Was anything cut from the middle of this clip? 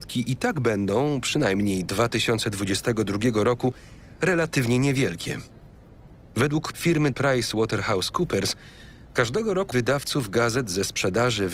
yes; 4 cuts; at 1.9 s, 6.7 s, 7.1 s, 9.7 s

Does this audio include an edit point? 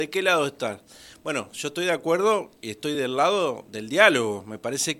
no; 0 cuts

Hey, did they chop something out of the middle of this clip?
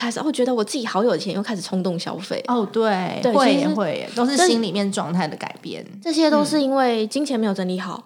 no; 0 cuts

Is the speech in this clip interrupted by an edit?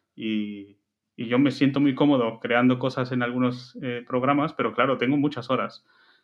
no; 0 cuts

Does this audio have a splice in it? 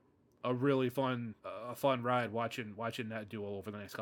yes; 1 cut; at 1.4 s

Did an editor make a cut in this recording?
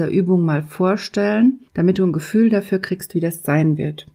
yes; 1 cut; at 1.7 s

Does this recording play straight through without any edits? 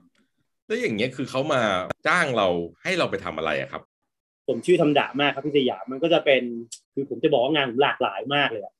no; 3 cuts; at 2.0 s, 2.7 s, 6.8 s

